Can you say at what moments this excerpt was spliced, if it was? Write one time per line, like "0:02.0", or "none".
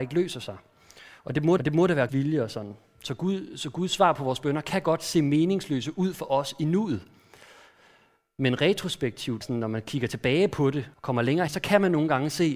0:01.6
0:02.1
0:09.4
0:10.9
0:11.5